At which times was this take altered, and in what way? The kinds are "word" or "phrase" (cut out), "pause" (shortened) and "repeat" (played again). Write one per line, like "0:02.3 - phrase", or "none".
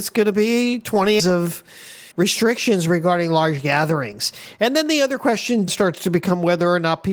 0:01.2 - phrase
0:02.1 - pause
0:05.7 - word